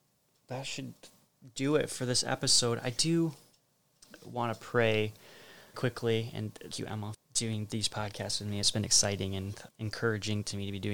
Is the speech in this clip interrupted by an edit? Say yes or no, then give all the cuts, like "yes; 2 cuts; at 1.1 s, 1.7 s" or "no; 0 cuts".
yes; 4 cuts; at 5.7 s, 6.7 s, 7.1 s, 9.7 s